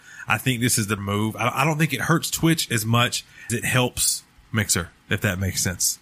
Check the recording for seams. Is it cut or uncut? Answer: cut